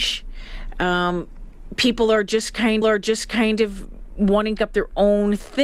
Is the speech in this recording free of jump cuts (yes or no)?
no